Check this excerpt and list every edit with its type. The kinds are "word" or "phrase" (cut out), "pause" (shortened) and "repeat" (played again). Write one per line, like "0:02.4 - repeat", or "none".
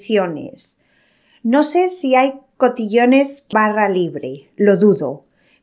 0:03.5 - word